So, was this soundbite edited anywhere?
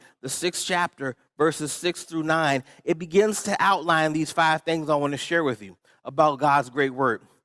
no; 0 cuts

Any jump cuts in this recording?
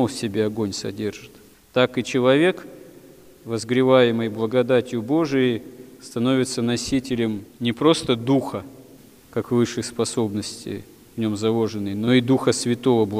no; 0 cuts

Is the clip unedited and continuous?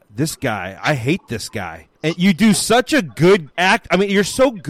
no; 2 cuts; at 2.0 s, 3.5 s

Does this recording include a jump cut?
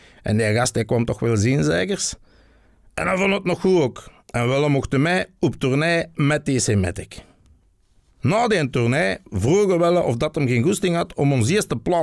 no; 0 cuts

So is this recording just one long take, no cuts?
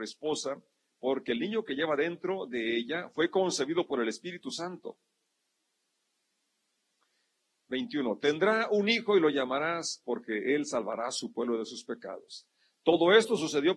no; 1 cut; at 10.0 s

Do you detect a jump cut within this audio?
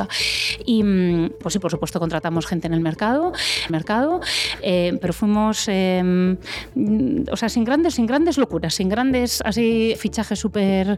yes; 4 cuts; at 1.4 s, 3.7 s, 7.9 s, 9.9 s

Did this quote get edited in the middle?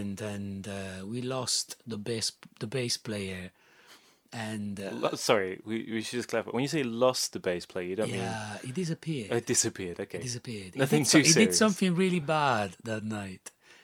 no; 0 cuts

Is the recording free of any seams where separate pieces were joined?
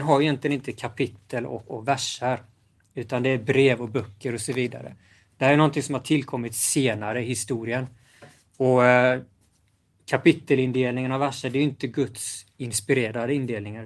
yes; 0 cuts

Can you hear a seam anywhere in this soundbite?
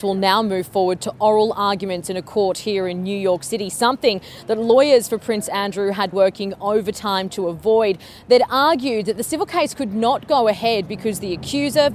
yes; 1 cut; at 6.1 s

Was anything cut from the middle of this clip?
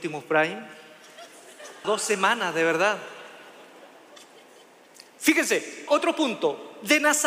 yes; 2 cuts; at 1.8 s, 5.9 s

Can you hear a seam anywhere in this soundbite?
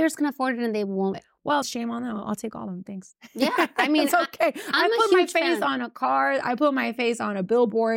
yes; 2 cuts; at 1.1 s, 1.6 s

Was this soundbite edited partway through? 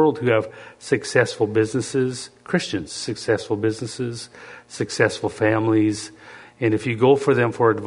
no; 0 cuts

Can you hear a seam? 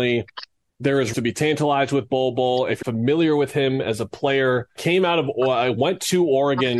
yes; 3 cuts; at 1.1 s, 2.8 s, 4.8 s

